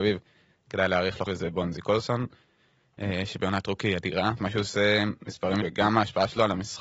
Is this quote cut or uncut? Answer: cut